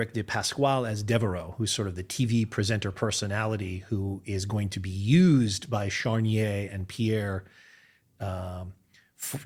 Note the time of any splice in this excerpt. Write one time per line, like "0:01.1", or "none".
none